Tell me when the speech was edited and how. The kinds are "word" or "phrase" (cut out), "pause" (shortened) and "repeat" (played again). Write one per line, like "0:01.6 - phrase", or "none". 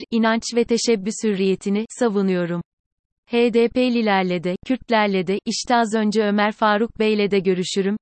none

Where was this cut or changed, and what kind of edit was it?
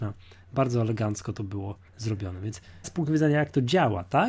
0:01.9 - pause
0:02.8 - word

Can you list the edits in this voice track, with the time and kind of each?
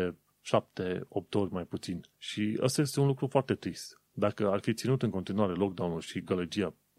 0:02.1 - pause
0:04.1 - pause

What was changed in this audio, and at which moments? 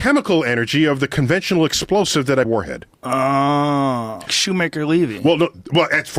0:02.4 - phrase
0:02.9 - pause
0:04.3 - word

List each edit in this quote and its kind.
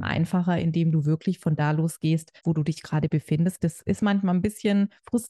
0:02.4 - pause

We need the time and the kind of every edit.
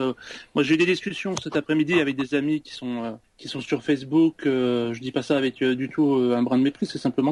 0:03.2 - pause

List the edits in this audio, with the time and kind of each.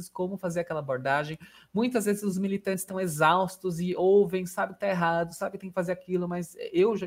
none

